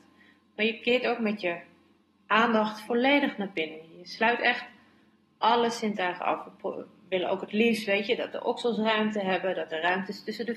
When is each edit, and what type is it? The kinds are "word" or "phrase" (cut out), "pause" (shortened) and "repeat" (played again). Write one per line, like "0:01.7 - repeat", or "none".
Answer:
none